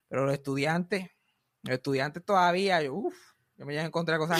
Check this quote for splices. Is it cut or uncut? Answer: uncut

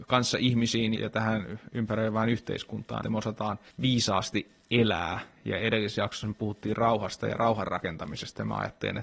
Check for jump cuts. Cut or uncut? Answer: cut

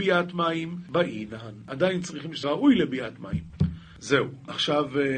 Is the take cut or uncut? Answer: cut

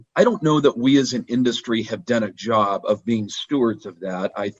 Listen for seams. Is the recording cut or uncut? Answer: cut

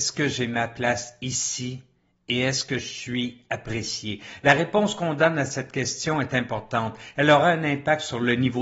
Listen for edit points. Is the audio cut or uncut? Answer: uncut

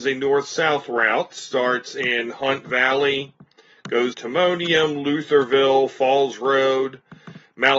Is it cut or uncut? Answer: cut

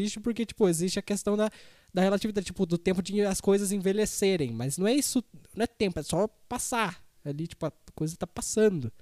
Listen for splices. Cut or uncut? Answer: uncut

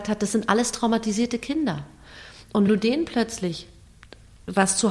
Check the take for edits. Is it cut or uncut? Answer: cut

